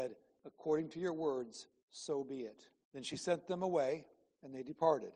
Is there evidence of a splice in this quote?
yes; 1 cut; at 2.8 s

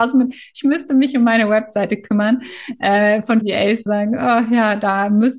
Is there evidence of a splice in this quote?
yes; 2 cuts; at 3.4 s, 3.9 s

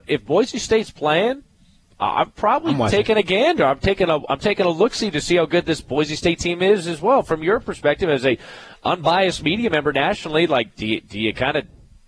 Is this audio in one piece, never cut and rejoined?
yes; 0 cuts

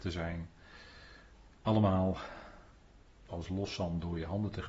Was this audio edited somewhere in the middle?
yes; 1 cut; at 3.3 s

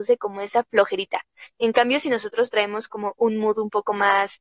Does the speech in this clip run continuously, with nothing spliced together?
yes; 0 cuts

